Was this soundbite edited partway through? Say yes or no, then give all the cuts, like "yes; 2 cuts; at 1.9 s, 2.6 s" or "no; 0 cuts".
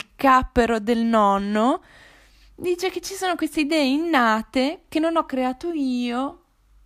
no; 0 cuts